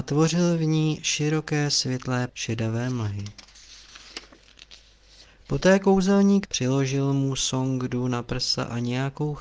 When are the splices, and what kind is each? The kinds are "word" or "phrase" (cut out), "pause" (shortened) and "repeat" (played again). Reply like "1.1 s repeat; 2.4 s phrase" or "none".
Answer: 2.3 s word; 6.4 s phrase